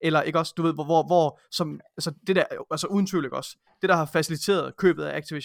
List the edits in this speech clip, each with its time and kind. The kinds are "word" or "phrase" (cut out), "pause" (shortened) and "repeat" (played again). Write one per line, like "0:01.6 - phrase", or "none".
none